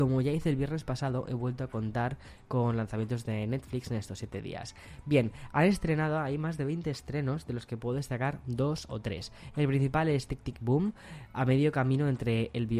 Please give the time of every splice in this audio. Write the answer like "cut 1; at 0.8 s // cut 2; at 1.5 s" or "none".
none